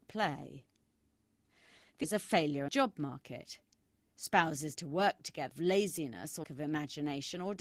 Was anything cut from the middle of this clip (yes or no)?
yes